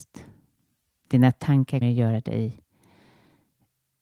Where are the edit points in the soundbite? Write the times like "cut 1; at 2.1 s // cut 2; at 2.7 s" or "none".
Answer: cut 1; at 1.8 s